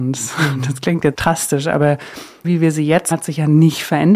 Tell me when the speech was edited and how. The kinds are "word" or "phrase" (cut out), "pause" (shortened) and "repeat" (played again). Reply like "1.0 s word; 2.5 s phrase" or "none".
1.1 s word; 2.4 s word; 3.1 s word